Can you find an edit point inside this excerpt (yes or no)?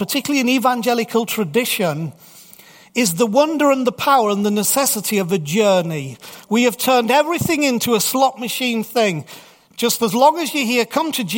no